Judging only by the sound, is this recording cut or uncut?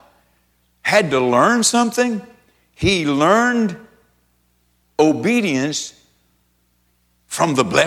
uncut